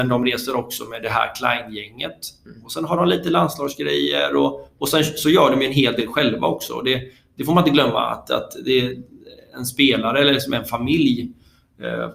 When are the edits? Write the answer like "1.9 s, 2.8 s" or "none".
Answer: none